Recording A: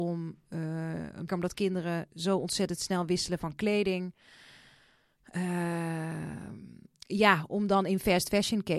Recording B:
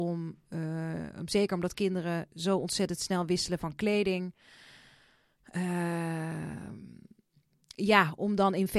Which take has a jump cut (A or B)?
A